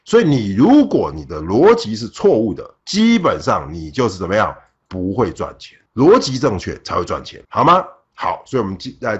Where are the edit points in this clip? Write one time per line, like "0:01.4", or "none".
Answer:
0:02.8
0:05.9
0:07.4